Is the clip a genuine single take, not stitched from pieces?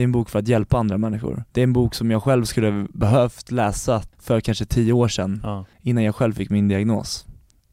no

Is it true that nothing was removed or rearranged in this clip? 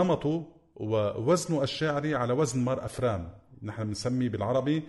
yes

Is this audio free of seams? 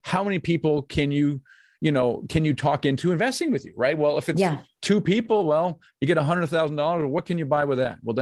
yes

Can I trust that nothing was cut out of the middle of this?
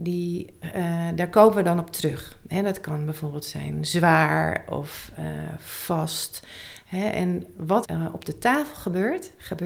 no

